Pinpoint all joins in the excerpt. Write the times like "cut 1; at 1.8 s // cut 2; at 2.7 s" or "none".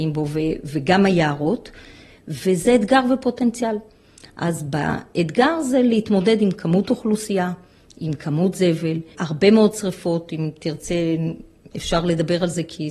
cut 1; at 9.1 s